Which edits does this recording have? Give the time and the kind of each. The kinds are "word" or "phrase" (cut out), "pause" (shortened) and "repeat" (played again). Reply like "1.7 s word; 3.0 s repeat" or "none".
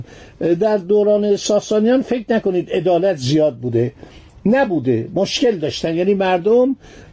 none

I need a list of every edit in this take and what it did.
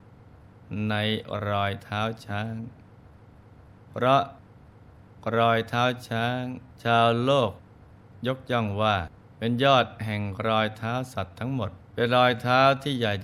6.7 s pause; 9.2 s pause; 11.8 s pause

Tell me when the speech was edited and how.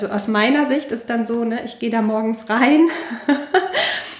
none

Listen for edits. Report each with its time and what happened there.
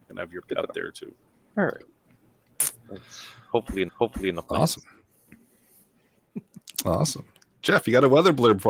1.3 s pause; 3.9 s repeat

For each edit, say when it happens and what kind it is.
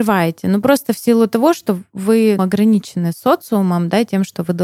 2.4 s word

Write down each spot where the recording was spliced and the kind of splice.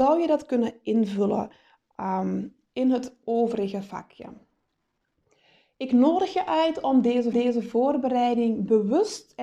7.3 s repeat

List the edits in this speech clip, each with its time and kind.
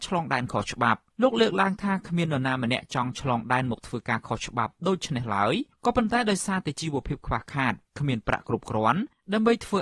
1.1 s pause; 5.7 s pause; 7.9 s pause

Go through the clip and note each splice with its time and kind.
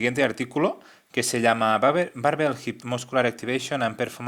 2.8 s word

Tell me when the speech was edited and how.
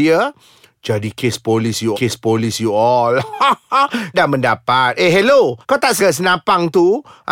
1.9 s repeat; 4.1 s word; 5.6 s pause; 6.0 s word

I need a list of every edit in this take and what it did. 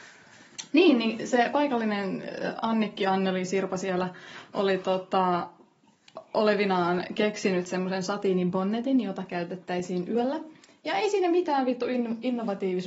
none

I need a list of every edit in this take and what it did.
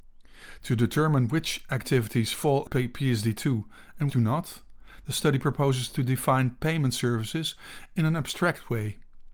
4.1 s word

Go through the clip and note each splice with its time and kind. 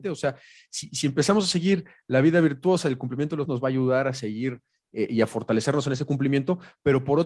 3.5 s word

